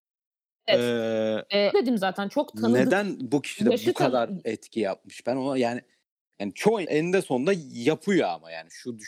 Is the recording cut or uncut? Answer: cut